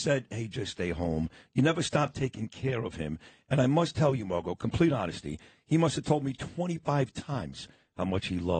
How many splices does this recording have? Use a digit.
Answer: 0